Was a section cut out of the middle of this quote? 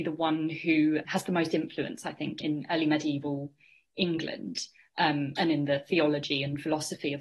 yes; 2 cuts; at 1.1 s, 2.4 s

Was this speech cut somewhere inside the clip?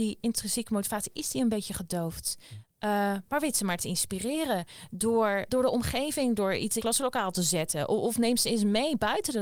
yes; 2 cuts; at 5.5 s, 6.8 s

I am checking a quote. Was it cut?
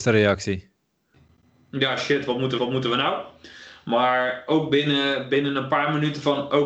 yes; 1 cut; at 2.6 s

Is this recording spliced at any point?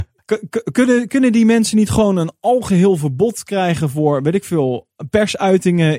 no; 0 cuts

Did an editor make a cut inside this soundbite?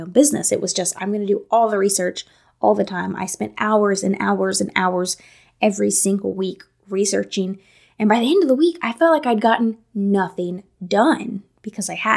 no; 0 cuts

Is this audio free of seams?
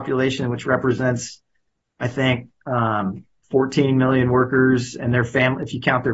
yes; 0 cuts

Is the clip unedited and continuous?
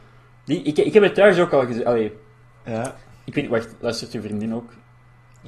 yes; 0 cuts

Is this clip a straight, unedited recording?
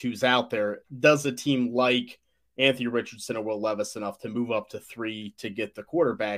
yes; 0 cuts

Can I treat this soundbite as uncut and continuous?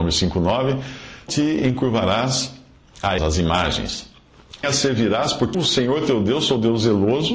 no; 4 cuts; at 1.3 s, 3.2 s, 4.6 s, 5.5 s

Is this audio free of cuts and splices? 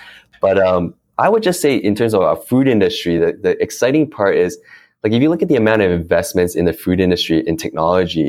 yes; 0 cuts

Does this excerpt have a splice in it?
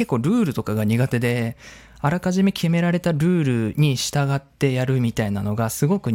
no; 0 cuts

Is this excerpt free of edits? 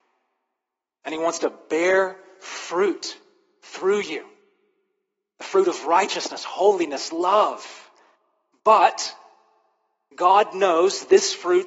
yes; 0 cuts

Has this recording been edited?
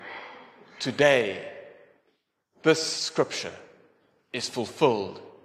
no; 0 cuts

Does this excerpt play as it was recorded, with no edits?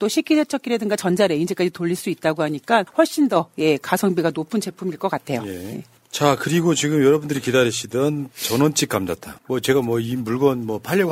yes; 0 cuts

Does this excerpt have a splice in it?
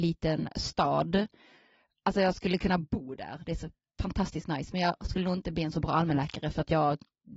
no; 0 cuts

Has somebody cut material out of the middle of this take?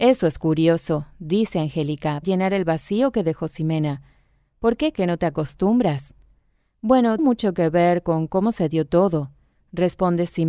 yes; 3 cuts; at 2.2 s, 4.9 s, 7.2 s

